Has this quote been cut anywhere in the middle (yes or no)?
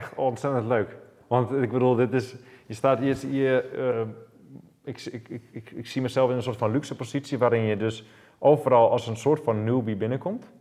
no